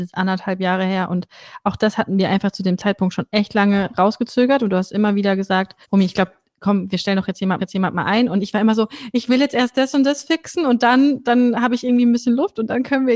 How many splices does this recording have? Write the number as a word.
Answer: two